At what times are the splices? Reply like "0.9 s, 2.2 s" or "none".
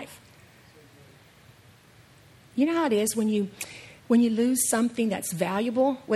4.0 s